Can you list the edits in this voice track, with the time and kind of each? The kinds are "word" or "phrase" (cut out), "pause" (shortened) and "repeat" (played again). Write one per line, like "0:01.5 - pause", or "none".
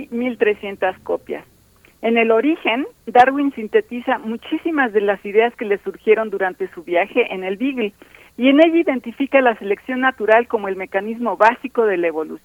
none